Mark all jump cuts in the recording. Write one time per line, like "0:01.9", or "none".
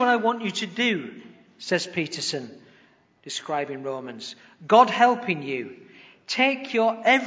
none